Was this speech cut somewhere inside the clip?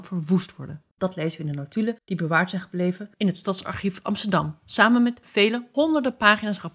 yes; 1 cut; at 0.9 s

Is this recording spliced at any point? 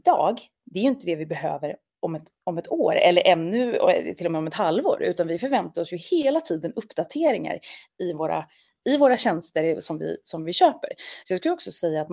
no; 0 cuts

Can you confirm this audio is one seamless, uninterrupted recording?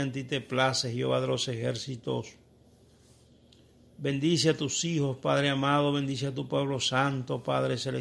yes; 0 cuts

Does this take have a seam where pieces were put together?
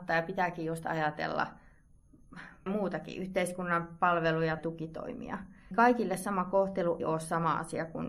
yes; 4 cuts; at 2.7 s, 4.6 s, 5.7 s, 7.0 s

